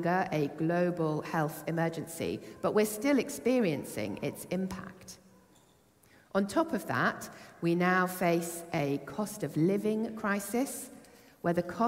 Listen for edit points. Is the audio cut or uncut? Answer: uncut